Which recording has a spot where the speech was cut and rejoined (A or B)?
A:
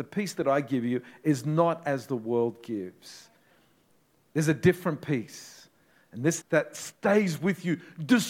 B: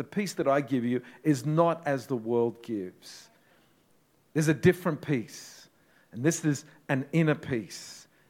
A